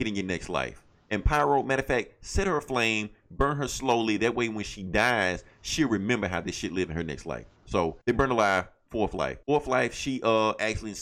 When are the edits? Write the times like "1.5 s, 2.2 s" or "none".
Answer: 8.0 s, 9.4 s